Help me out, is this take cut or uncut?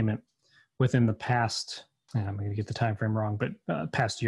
cut